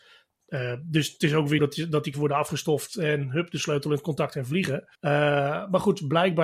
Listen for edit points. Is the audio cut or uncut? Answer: cut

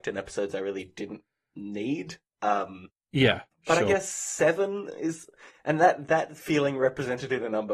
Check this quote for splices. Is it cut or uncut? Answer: uncut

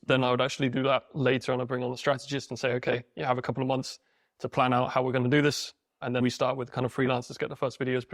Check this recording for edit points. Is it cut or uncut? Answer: cut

